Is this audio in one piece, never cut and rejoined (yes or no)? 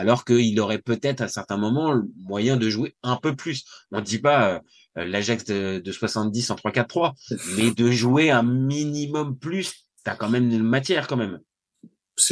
yes